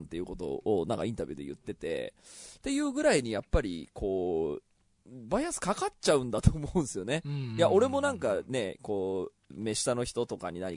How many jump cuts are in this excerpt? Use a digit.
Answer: 1